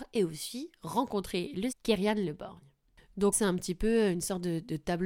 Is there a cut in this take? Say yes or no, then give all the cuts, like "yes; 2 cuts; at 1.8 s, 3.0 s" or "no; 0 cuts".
yes; 2 cuts; at 1.7 s, 3.3 s